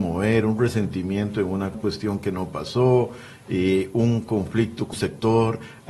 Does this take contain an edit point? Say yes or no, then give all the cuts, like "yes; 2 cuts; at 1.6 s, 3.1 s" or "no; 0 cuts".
yes; 2 cuts; at 1.7 s, 4.9 s